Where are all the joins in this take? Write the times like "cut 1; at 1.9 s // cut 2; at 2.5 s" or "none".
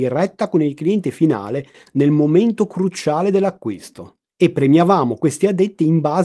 none